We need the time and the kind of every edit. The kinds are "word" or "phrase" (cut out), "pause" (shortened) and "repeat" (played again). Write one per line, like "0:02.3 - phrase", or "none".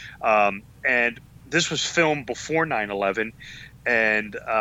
none